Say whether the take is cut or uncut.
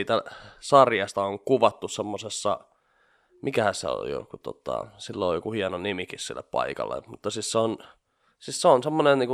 uncut